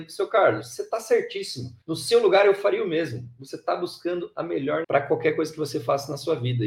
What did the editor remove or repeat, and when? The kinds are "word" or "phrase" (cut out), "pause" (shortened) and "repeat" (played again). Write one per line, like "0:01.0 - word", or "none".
0:01.8 - pause
0:04.8 - word